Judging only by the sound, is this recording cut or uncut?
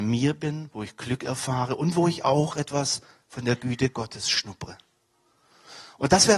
uncut